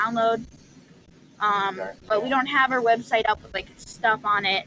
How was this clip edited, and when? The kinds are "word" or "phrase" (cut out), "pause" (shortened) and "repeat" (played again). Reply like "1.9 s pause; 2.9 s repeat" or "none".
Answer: 2.0 s pause